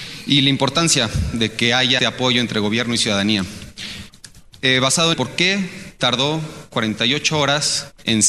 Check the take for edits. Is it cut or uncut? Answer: cut